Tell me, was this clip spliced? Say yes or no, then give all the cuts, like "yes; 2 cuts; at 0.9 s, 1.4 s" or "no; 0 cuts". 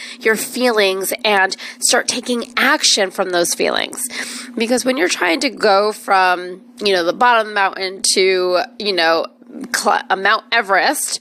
no; 0 cuts